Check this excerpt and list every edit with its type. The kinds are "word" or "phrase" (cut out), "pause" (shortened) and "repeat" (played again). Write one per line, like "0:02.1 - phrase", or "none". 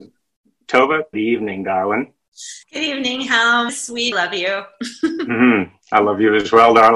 0:01.1 - word
0:02.6 - pause
0:03.7 - word
0:04.1 - phrase